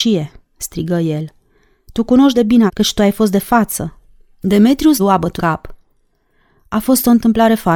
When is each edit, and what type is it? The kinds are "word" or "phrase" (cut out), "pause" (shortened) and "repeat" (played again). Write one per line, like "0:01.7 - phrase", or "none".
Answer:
0:02.3 - word
0:02.7 - word
0:05.0 - word
0:05.4 - word